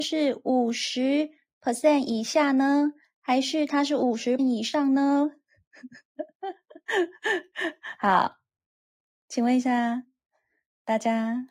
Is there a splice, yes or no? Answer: yes